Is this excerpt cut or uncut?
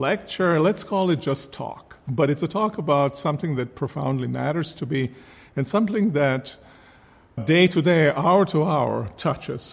cut